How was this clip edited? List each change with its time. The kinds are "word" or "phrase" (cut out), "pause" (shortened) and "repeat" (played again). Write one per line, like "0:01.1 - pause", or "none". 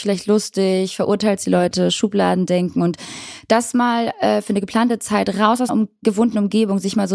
0:05.7 - word